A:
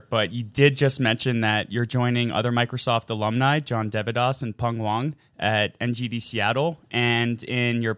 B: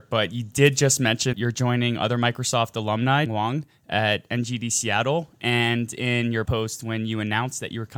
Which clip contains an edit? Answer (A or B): B